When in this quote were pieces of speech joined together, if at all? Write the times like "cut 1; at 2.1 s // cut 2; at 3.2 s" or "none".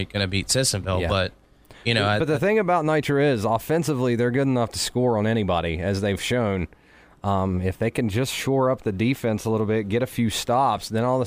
none